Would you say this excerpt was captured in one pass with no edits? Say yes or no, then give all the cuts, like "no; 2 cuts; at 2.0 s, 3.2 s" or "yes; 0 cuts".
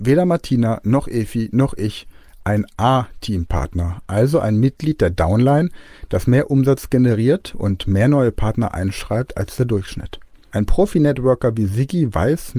yes; 0 cuts